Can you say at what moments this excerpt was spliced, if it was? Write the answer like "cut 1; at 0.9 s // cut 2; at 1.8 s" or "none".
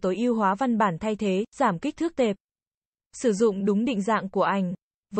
none